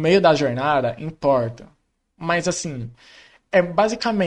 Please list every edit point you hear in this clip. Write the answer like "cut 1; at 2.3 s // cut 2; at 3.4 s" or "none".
none